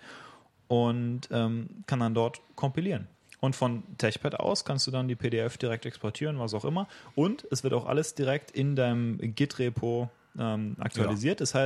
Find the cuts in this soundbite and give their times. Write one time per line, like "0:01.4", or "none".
none